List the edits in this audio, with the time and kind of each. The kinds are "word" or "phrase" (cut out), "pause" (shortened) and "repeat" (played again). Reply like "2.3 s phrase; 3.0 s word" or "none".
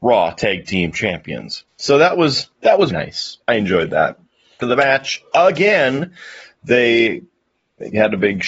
1.7 s pause; 2.5 s pause; 2.9 s word; 3.4 s pause; 4.6 s word